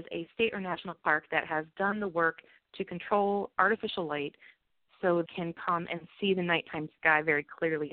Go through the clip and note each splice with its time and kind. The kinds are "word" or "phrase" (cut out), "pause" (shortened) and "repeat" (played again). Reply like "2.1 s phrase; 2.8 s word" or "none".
5.3 s phrase